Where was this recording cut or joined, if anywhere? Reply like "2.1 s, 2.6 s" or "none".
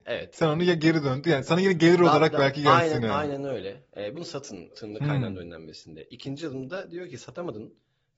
4.1 s, 4.7 s

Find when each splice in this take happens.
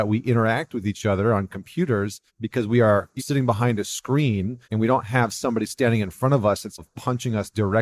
2.3 s, 3.2 s, 4.6 s, 6.8 s

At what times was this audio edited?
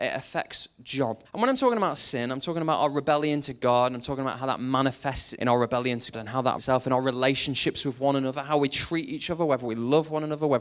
1.2 s, 5.4 s, 6.1 s, 6.6 s

